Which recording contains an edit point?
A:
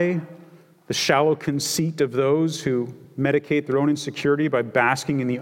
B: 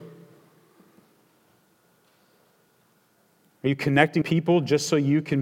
B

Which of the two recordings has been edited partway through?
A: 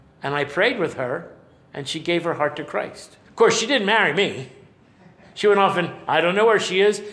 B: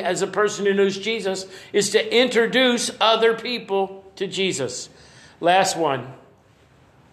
A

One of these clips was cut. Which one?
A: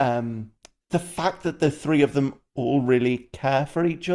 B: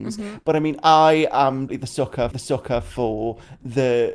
B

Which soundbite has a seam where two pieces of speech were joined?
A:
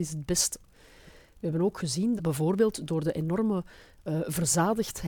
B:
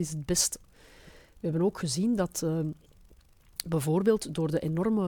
A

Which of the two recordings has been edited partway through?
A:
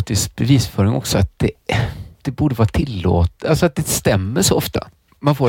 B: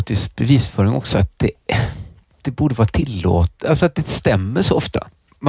A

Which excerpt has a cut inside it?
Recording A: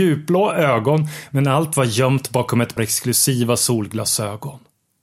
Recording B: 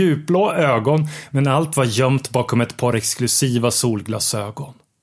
A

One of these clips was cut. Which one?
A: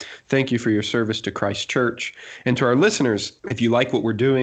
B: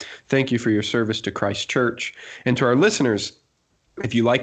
A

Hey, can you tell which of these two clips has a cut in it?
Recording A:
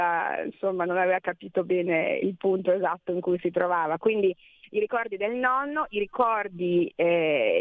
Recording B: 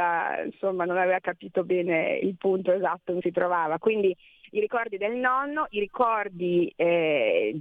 B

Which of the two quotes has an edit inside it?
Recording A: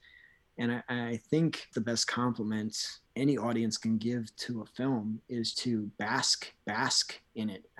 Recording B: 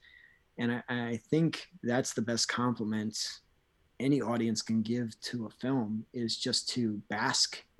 A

